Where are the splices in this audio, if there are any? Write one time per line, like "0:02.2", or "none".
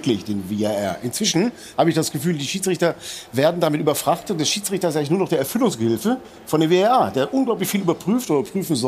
none